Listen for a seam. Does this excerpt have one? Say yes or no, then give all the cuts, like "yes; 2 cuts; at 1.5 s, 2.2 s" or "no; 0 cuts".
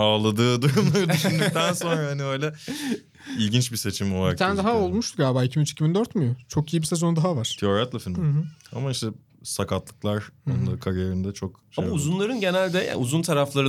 no; 0 cuts